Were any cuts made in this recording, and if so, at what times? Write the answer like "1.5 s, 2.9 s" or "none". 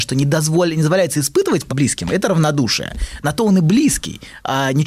1.7 s